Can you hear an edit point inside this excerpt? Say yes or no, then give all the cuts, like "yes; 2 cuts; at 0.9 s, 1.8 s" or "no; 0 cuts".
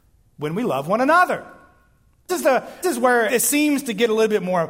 yes; 3 cuts; at 2.3 s, 2.8 s, 3.3 s